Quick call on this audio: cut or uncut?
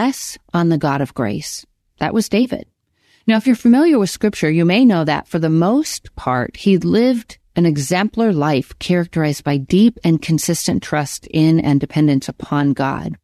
uncut